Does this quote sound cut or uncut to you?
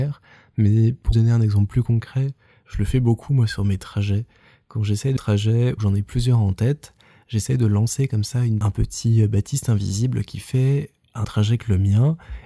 cut